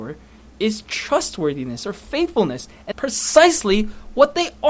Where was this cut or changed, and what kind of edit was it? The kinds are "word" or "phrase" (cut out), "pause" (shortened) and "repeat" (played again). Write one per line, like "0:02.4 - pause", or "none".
0:02.9 - word